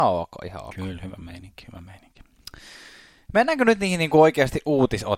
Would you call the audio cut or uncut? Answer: uncut